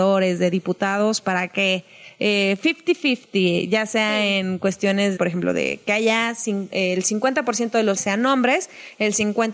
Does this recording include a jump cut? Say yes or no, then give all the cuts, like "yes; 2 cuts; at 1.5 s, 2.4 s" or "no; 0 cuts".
yes; 3 cuts; at 1.2 s, 5.2 s, 8.0 s